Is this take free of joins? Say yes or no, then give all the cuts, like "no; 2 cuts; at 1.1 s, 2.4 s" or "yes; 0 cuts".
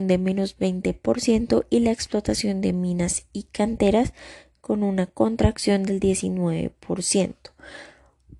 yes; 0 cuts